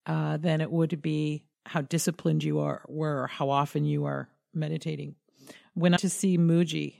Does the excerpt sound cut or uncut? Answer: cut